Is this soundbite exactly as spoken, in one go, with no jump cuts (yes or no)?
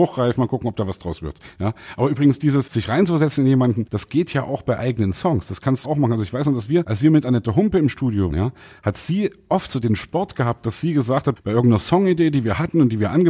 no